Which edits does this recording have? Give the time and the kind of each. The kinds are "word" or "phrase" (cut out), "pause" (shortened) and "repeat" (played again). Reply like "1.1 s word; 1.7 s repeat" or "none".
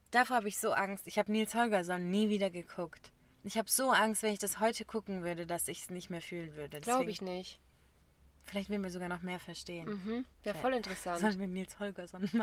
3.3 s pause; 10.3 s pause